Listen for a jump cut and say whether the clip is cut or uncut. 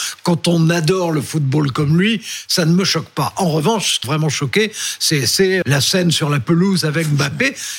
cut